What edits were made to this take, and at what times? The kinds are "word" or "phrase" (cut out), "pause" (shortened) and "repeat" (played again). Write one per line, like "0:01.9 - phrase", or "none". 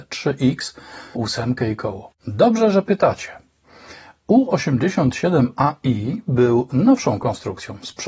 0:01.2 - word
0:02.2 - pause

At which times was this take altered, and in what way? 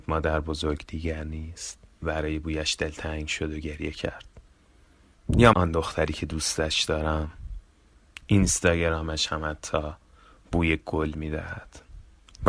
0:02.0 - word
0:05.5 - word

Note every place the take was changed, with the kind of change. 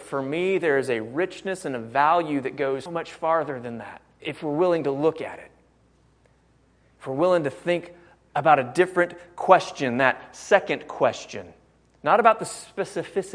0:02.9 - word
0:04.2 - word

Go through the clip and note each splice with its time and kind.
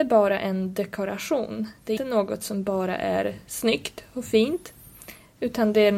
0:02.0 - word

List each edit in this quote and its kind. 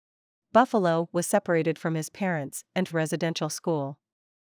0:02.9 - phrase

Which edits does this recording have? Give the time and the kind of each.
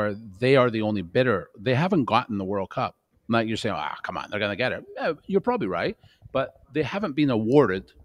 0:03.1 - pause
0:06.6 - pause

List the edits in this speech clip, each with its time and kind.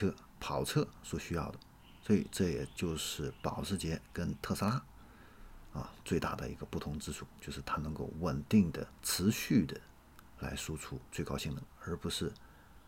0:08.9 - pause
0:11.1 - pause

